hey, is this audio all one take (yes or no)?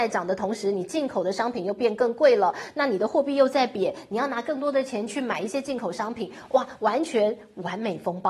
yes